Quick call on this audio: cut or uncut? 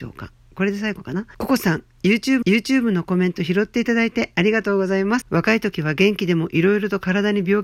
cut